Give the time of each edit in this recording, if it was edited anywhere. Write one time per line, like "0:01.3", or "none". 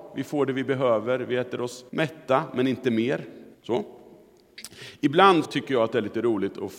0:01.9
0:03.5
0:05.4